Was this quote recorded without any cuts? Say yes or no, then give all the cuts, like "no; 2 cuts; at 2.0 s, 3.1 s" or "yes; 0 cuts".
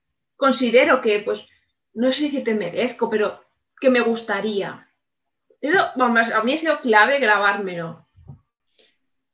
yes; 0 cuts